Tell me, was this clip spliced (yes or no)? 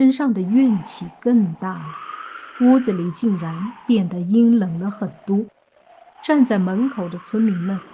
no